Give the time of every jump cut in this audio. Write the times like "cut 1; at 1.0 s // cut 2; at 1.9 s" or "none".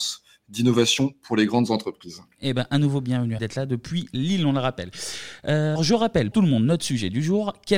cut 1; at 3.4 s // cut 2; at 5.8 s // cut 3; at 6.3 s